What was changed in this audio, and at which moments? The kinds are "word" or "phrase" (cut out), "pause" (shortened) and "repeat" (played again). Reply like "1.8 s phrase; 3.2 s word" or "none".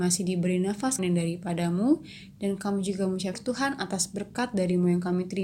1.0 s word; 3.3 s word